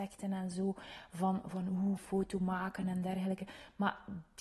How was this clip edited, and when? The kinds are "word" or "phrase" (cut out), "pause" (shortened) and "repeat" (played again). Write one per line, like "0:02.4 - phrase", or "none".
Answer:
0:02.0 - phrase